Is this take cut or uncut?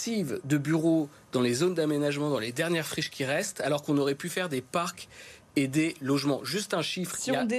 uncut